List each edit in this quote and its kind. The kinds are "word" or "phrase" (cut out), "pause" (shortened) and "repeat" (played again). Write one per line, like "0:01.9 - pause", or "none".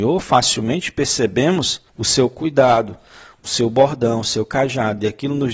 0:01.9 - pause

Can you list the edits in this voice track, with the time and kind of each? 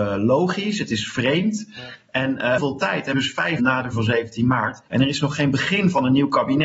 0:02.6 - phrase
0:03.1 - phrase
0:03.6 - word
0:03.9 - word
0:04.9 - pause

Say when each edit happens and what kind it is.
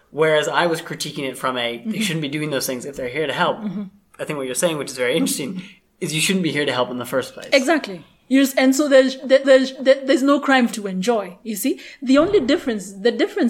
0:09.4 - repeat
0:10.7 - word

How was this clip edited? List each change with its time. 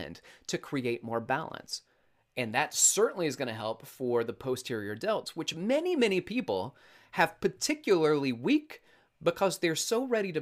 none

